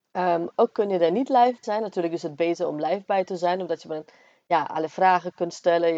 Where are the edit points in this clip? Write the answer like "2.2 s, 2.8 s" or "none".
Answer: 1.6 s